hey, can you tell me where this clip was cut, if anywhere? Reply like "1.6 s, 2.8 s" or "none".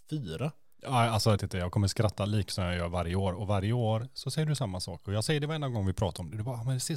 1.4 s, 2.5 s